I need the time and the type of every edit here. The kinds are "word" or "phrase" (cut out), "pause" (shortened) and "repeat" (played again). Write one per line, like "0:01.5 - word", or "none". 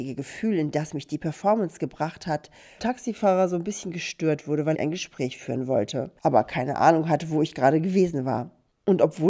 0:02.8 - word
0:04.7 - phrase
0:06.2 - pause